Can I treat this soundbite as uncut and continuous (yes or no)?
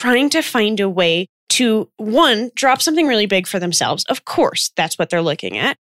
yes